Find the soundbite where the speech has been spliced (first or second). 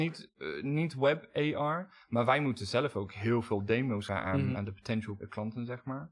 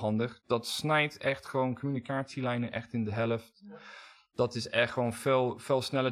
first